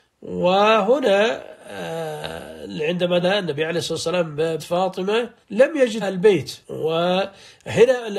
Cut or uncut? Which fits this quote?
cut